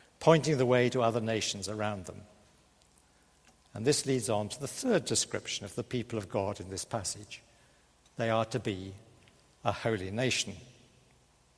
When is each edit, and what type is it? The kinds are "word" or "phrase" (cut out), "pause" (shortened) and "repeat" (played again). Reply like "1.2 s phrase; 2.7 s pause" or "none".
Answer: none